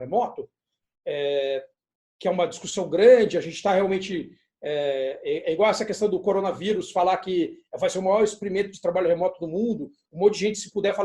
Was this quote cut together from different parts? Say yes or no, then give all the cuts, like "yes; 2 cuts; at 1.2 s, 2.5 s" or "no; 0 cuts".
no; 0 cuts